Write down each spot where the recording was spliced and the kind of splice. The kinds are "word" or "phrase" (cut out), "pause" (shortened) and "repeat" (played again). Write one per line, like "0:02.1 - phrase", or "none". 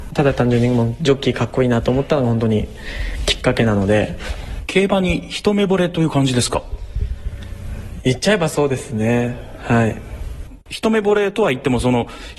0:10.6 - pause